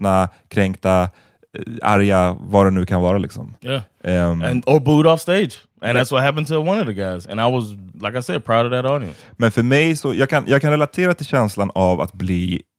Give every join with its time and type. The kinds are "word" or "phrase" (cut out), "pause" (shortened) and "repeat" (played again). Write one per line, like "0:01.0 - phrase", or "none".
0:07.9 - word